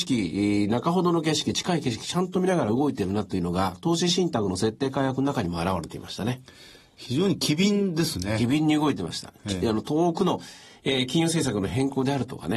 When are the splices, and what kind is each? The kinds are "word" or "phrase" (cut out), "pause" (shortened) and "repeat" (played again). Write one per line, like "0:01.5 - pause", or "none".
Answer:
none